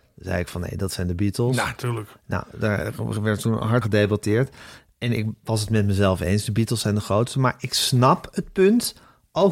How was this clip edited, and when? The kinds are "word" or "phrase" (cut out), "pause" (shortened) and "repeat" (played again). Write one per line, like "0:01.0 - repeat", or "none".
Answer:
0:03.8 - word